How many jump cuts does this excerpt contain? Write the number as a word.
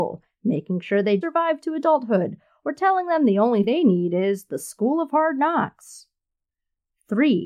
two